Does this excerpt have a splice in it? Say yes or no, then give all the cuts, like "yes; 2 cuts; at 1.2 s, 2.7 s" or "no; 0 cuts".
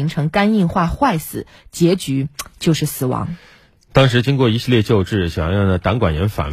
no; 0 cuts